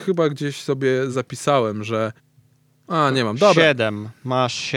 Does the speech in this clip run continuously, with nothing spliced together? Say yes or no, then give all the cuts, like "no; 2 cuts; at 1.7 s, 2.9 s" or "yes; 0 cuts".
yes; 0 cuts